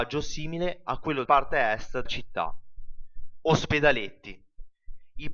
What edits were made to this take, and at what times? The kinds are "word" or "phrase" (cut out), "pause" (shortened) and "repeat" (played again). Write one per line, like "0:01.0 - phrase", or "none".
0:01.3 - word
0:02.1 - word